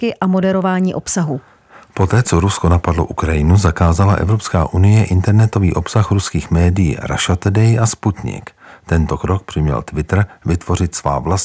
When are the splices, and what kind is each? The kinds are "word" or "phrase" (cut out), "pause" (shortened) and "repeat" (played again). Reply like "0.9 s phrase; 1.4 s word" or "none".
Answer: none